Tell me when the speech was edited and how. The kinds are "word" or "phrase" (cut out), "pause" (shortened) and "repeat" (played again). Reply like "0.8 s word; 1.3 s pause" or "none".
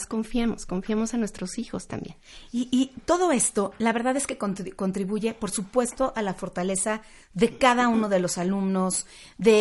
none